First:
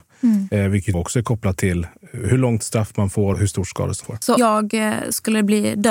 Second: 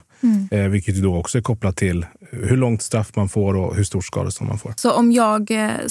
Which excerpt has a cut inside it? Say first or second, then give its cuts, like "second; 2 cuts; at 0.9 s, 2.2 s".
first; 4 cuts; at 0.9 s, 3.3 s, 4.0 s, 4.4 s